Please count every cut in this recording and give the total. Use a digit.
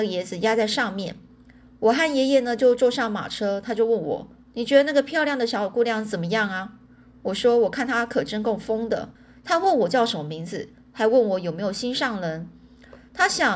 1